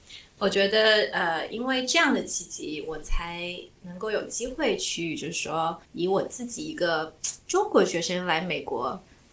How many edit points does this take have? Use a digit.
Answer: 1